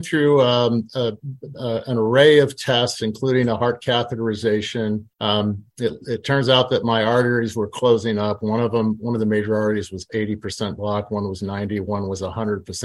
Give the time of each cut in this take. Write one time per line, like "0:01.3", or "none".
0:05.1